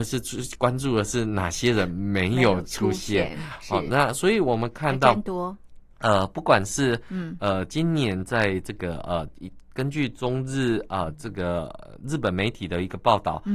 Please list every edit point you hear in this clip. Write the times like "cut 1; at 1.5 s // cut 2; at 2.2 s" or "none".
none